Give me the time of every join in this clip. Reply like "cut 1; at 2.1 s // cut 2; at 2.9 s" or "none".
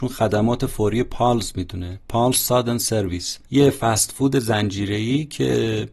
cut 1; at 3.5 s